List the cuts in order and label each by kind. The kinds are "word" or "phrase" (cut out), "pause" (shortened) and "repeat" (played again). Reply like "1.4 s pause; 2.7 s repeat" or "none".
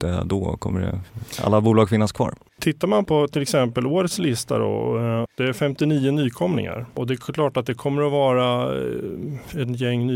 none

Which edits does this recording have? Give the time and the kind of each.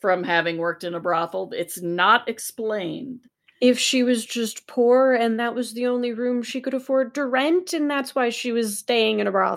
none

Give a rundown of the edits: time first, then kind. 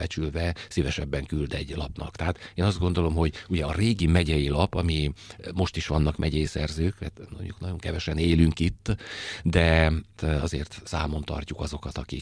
none

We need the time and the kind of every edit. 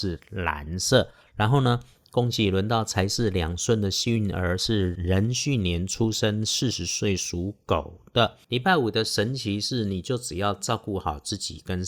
none

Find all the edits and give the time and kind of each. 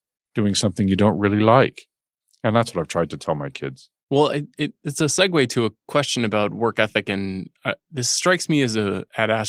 none

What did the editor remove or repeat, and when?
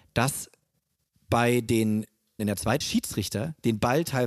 2.4 s word; 2.8 s phrase

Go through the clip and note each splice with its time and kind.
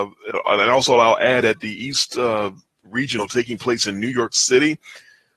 1.4 s word

